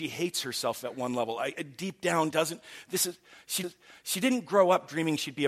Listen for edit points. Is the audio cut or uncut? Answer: cut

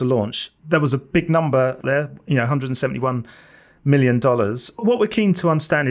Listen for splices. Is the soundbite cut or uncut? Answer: cut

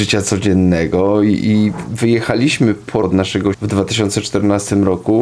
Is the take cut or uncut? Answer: cut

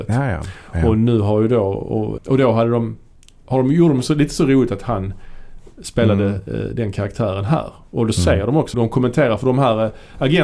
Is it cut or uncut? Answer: cut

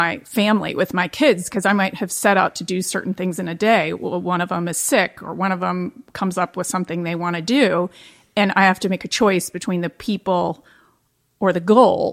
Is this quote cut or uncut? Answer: uncut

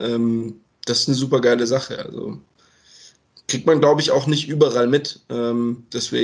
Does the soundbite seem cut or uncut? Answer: uncut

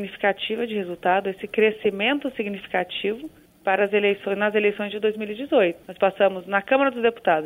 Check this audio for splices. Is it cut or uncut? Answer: uncut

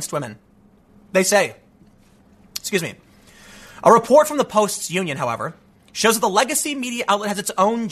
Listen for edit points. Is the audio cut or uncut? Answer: uncut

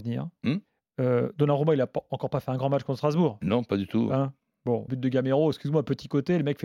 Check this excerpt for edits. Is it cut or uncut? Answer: cut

